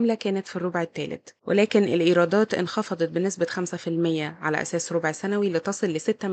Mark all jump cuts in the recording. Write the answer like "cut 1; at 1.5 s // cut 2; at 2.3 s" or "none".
none